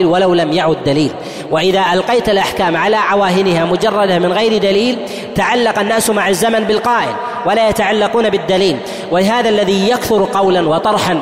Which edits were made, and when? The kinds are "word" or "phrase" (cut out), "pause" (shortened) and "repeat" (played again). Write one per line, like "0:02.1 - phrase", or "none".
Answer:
none